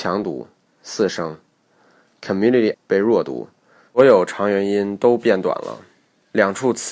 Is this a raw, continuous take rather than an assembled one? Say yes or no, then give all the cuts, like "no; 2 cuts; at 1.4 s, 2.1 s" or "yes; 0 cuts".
no; 1 cut; at 2.7 s